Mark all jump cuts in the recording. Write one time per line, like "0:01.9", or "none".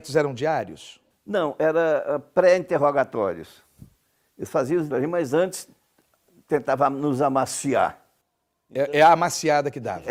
0:04.9